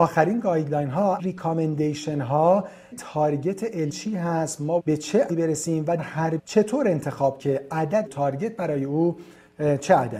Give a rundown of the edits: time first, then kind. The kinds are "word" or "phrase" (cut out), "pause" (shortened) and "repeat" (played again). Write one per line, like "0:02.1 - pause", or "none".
0:01.2 - word
0:02.9 - word
0:03.9 - word
0:04.8 - word
0:05.3 - word
0:06.0 - word
0:06.4 - word
0:07.4 - word
0:08.1 - word